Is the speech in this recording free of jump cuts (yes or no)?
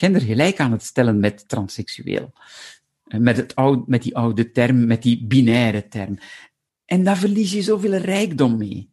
yes